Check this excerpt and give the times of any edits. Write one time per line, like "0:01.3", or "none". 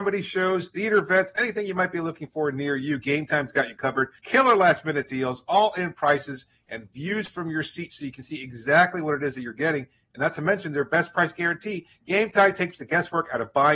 0:04.2

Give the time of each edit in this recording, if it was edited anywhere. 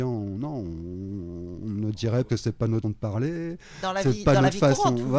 0:02.3
0:02.8

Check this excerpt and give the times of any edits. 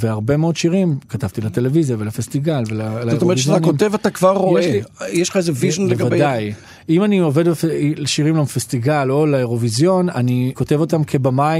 0:10.5

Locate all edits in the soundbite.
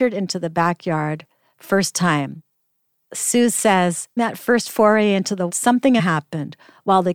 0:01.6
0:04.2
0:05.5
0:06.0

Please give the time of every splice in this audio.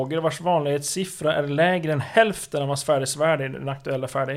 none

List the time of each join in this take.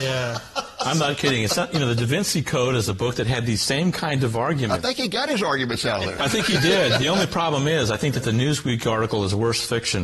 none

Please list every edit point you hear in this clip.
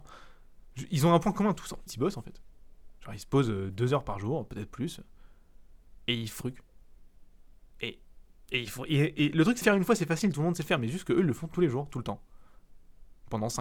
0:01.9
0:06.4
0:09.6

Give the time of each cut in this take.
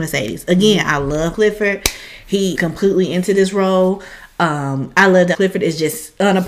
0:01.3
0:02.5
0:05.3

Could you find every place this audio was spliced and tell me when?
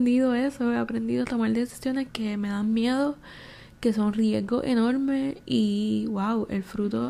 0:02.1
0:05.4

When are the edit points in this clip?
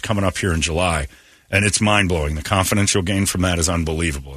none

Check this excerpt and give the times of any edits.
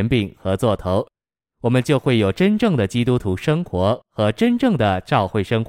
none

